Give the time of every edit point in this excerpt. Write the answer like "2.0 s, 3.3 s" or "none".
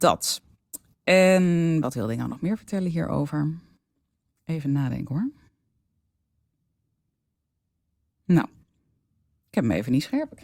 none